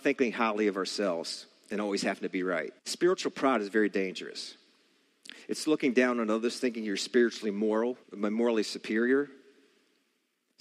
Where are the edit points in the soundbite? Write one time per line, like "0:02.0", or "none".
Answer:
0:02.8
0:08.0